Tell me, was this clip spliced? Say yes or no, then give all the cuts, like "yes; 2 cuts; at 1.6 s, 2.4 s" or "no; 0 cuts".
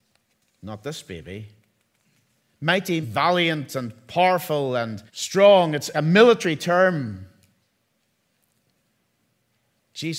yes; 3 cuts; at 3.0 s, 5.1 s, 5.9 s